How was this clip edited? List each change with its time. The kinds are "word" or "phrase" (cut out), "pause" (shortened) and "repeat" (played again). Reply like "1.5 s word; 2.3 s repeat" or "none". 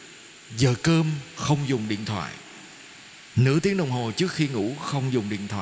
none